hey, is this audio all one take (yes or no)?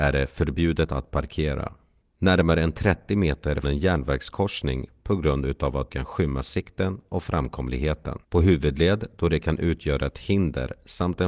no